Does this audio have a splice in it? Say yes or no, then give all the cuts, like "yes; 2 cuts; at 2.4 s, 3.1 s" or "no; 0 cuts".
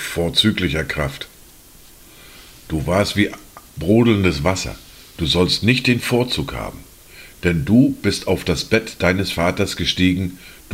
no; 0 cuts